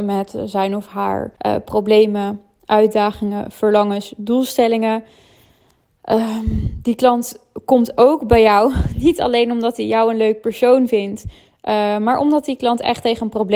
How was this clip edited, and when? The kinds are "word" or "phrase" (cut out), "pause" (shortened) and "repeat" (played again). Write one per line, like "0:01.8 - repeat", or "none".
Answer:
0:01.4 - pause